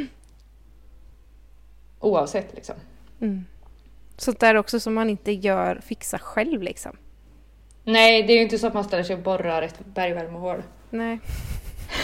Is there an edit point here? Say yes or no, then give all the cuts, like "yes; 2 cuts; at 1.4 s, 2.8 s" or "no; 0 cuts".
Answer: no; 0 cuts